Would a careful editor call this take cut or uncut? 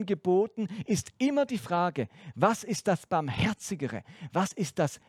uncut